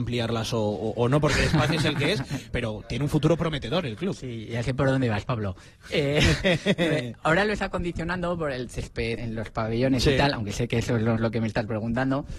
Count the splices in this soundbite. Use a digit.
4